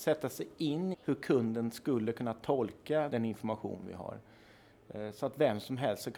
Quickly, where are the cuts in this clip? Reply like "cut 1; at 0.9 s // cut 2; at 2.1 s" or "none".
cut 1; at 0.9 s // cut 2; at 3.1 s

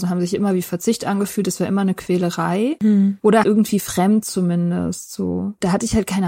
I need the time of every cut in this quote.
cut 1; at 3.4 s

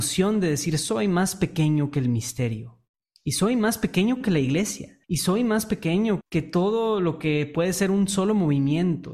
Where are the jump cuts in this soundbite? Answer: cut 1; at 5.0 s // cut 2; at 6.2 s

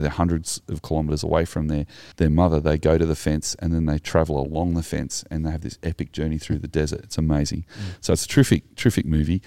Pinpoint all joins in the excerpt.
cut 1; at 2.1 s

